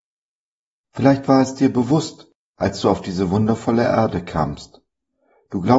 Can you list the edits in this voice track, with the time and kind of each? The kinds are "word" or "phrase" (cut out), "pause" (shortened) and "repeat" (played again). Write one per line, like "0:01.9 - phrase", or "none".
none